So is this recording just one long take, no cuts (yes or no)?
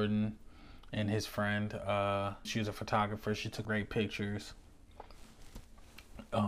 no